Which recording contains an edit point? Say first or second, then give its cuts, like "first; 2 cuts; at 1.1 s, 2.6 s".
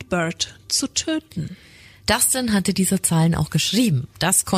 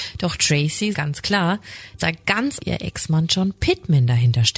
second; 3 cuts; at 0.9 s, 2.0 s, 2.6 s